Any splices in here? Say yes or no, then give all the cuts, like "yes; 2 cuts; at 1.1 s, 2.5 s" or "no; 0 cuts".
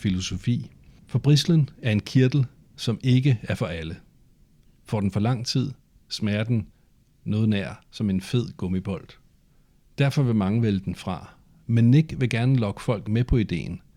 no; 0 cuts